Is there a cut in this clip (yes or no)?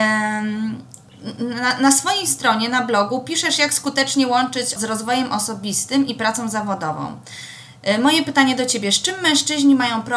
yes